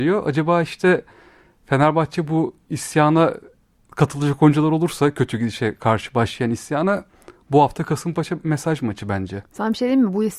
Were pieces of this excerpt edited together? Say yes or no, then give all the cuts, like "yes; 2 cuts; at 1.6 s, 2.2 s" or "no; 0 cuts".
no; 0 cuts